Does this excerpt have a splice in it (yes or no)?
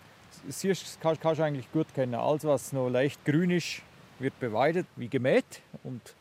yes